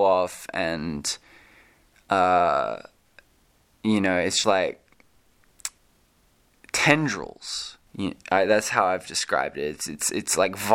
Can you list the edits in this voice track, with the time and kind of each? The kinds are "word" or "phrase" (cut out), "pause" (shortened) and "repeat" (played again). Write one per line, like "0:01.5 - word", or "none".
0:04.4 - word
0:07.9 - pause